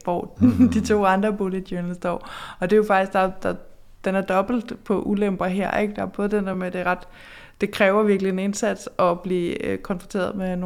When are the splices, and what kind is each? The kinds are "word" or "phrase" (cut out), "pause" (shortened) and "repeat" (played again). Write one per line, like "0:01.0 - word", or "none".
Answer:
none